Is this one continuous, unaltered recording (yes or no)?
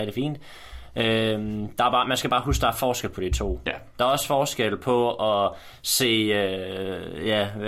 yes